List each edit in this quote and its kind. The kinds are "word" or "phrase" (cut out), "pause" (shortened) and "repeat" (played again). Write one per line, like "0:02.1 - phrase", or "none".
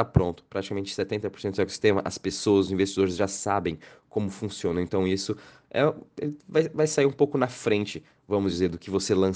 none